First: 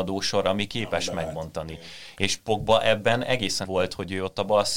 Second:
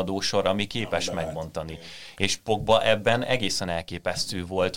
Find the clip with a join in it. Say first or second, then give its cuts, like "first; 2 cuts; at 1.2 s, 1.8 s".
first; 1 cut; at 3.6 s